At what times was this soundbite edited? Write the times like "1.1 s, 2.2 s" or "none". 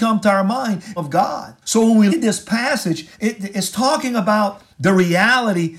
1.0 s, 1.6 s, 2.1 s, 3.1 s, 4.7 s